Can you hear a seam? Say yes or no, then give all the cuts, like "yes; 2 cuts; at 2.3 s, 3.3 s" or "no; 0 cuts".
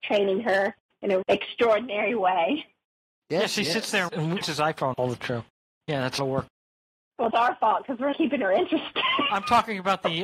yes; 7 cuts; at 1.2 s, 4.1 s, 4.4 s, 4.9 s, 6.2 s, 7.3 s, 8.1 s